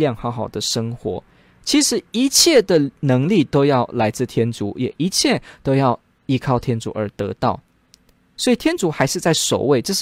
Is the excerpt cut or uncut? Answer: uncut